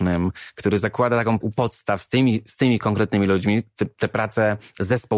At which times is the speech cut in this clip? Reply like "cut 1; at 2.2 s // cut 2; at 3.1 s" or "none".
cut 1; at 1.4 s